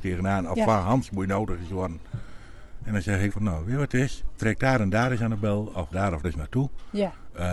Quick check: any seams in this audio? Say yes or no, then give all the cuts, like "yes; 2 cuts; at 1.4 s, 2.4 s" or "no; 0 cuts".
yes; 3 cuts; at 3.3 s, 5.9 s, 6.2 s